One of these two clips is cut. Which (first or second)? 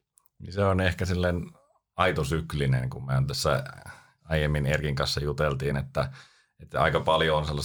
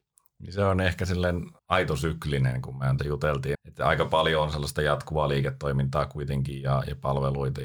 second